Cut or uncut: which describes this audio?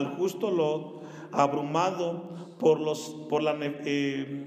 uncut